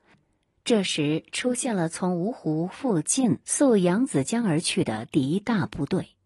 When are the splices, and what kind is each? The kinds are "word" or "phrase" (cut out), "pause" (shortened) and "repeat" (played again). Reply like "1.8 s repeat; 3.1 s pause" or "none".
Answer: 3.4 s pause